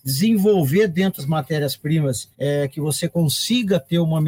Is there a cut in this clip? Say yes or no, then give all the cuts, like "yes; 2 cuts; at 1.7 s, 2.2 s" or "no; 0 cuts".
yes; 3 cuts; at 1.2 s, 2.3 s, 3.1 s